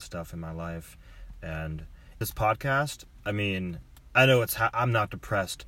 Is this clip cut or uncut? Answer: cut